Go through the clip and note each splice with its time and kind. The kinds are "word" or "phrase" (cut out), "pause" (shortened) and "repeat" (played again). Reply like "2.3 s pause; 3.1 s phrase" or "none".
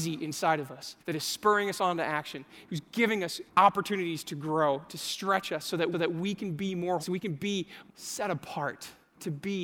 1.0 s pause; 3.5 s pause; 5.9 s repeat; 7.0 s word; 7.9 s word

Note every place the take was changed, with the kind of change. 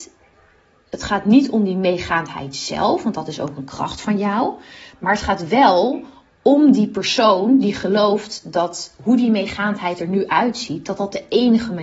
none

